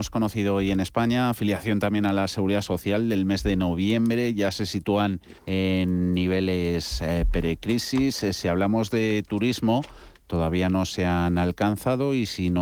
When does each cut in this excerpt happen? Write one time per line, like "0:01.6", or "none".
0:05.4